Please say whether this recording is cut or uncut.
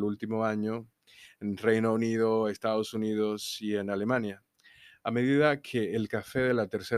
uncut